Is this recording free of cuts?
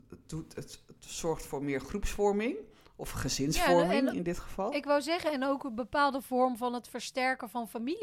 yes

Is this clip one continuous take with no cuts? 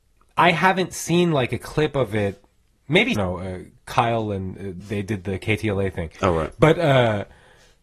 no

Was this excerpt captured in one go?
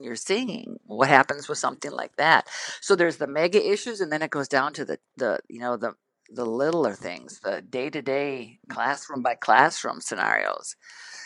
yes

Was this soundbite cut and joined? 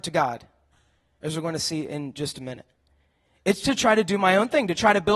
no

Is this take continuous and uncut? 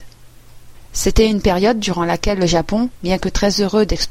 yes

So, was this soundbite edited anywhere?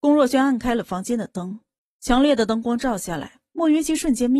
yes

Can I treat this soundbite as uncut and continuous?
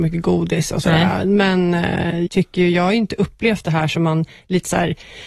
no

